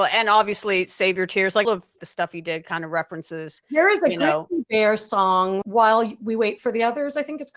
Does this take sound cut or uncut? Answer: cut